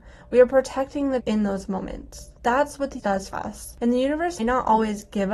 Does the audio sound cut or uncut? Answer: cut